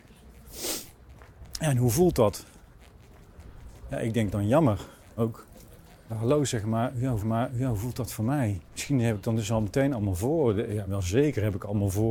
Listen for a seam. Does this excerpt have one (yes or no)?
yes